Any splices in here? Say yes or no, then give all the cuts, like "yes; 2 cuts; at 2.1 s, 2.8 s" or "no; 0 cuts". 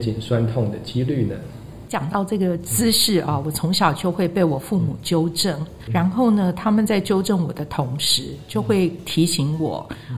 yes; 1 cut; at 5.9 s